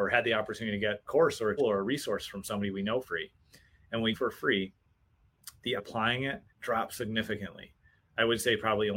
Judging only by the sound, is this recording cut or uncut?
cut